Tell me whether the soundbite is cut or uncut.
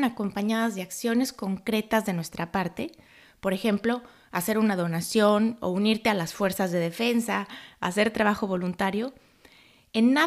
uncut